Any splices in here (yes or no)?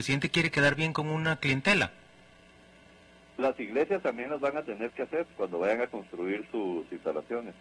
no